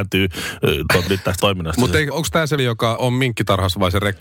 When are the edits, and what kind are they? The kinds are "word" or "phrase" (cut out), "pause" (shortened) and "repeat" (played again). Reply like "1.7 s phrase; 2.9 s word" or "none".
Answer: 1.1 s word; 1.4 s word; 2.1 s word; 2.6 s word; 3.0 s word